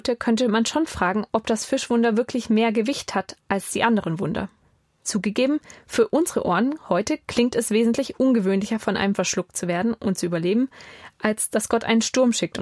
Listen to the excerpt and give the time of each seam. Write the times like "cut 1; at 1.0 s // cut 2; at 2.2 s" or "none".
cut 1; at 4.6 s // cut 2; at 9.1 s